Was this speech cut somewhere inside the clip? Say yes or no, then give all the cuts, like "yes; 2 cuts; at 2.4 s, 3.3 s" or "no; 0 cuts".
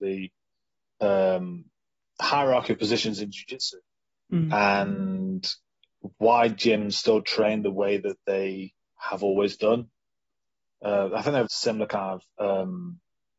yes; 1 cut; at 11.5 s